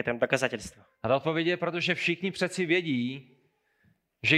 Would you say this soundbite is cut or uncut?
uncut